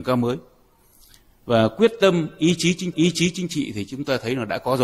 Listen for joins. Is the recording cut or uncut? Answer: cut